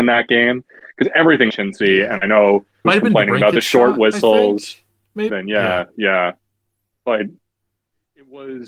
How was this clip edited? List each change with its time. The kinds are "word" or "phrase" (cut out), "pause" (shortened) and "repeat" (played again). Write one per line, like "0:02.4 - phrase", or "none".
0:01.5 - phrase
0:02.8 - phrase
0:05.3 - phrase